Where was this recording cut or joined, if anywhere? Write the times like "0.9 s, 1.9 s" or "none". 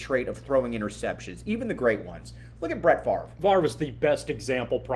none